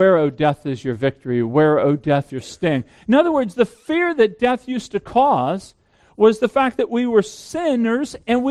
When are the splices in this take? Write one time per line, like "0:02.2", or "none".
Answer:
0:02.3